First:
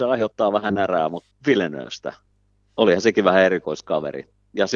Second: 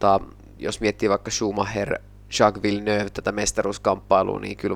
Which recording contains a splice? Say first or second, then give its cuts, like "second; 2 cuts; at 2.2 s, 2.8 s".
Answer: first; 1 cut; at 1.3 s